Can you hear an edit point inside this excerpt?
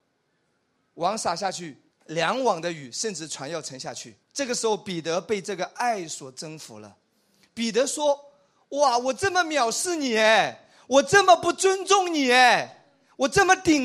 yes; 2 cuts; at 1.9 s, 4.2 s

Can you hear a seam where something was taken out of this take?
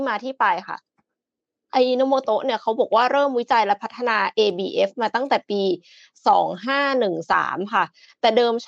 no; 0 cuts

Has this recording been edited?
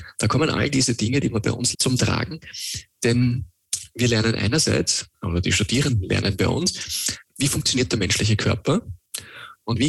yes; 2 cuts; at 1.7 s, 5.1 s

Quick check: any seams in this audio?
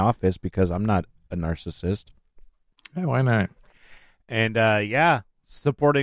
no; 0 cuts

